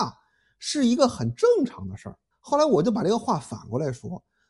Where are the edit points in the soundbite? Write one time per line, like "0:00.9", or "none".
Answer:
0:02.3